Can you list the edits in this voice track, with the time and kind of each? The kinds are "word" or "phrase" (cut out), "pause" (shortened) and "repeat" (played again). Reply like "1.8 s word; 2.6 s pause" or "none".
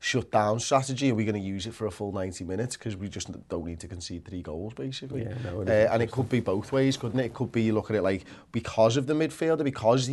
none